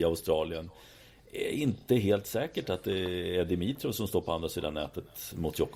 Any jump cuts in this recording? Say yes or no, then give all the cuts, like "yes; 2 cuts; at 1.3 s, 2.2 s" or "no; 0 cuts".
no; 0 cuts